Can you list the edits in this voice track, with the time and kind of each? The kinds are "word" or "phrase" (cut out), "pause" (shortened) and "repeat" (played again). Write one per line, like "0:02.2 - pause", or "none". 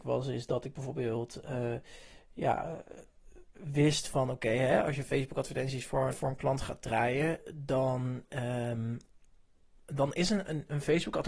0:06.1 - word